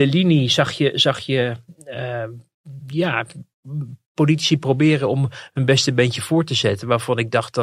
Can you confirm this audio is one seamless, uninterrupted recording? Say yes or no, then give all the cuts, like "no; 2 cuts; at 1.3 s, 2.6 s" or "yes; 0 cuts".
yes; 0 cuts